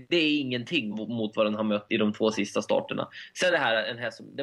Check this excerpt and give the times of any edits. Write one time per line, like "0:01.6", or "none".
0:00.9
0:01.9
0:03.5